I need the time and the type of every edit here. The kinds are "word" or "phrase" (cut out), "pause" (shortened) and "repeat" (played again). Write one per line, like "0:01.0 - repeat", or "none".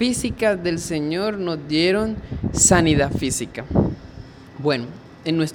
0:04.5 - pause